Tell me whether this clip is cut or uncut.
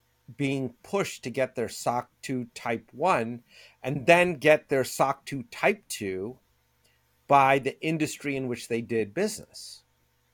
uncut